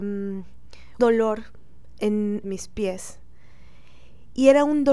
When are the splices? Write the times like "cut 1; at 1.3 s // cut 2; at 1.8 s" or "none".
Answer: cut 1; at 1.0 s // cut 2; at 2.4 s